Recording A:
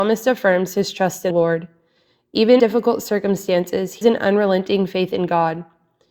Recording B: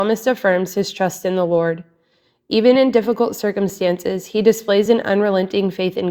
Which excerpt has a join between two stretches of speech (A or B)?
A